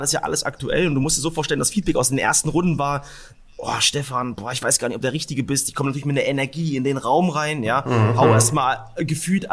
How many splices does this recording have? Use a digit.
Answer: 1